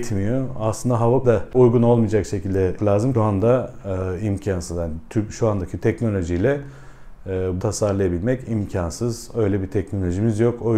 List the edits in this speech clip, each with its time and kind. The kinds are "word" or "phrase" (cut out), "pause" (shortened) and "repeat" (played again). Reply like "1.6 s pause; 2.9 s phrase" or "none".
1.2 s word; 1.5 s word; 2.8 s word; 3.1 s phrase; 7.6 s word